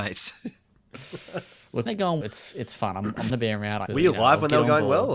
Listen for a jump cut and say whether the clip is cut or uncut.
cut